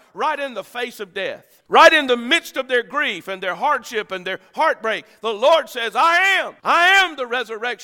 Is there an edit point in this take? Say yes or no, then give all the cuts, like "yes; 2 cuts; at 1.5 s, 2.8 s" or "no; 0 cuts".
yes; 2 cuts; at 1.6 s, 6.6 s